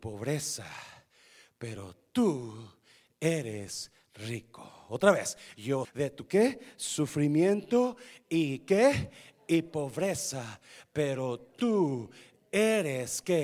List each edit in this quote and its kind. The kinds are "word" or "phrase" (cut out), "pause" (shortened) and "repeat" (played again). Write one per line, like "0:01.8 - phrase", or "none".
0:05.8 - word